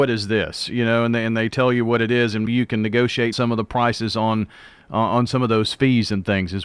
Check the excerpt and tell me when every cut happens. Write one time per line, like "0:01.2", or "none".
0:02.5
0:03.3